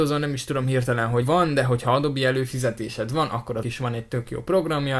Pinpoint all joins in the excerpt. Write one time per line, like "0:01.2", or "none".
0:01.2
0:03.6

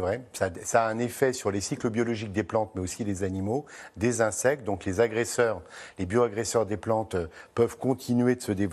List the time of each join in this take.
none

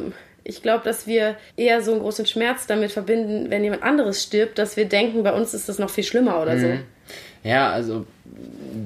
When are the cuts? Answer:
0:01.5

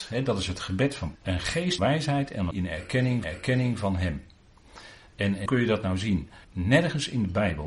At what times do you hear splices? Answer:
0:01.1
0:01.8
0:02.5
0:03.2
0:05.5
0:06.4

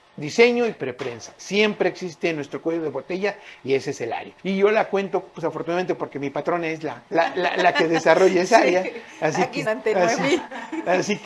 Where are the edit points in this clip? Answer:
0:04.4
0:07.1
0:09.6

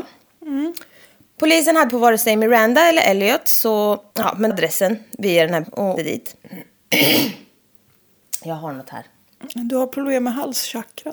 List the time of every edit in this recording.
0:01.0
0:01.9
0:04.1
0:04.5
0:05.6
0:06.0
0:06.4

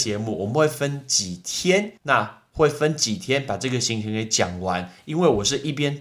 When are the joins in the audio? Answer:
0:02.0

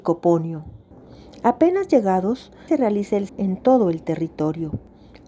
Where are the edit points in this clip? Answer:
0:02.7
0:03.3

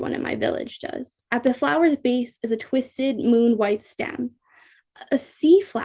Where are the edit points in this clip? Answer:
0:01.3

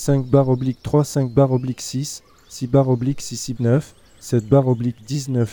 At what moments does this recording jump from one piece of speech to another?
0:03.6

